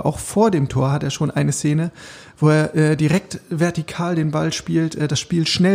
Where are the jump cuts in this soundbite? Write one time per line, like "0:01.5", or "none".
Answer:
none